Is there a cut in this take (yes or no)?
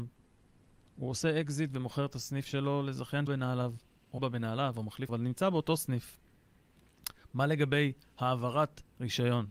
yes